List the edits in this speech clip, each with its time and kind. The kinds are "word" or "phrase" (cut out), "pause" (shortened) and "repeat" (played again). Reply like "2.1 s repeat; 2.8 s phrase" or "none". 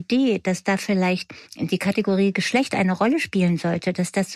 1.5 s pause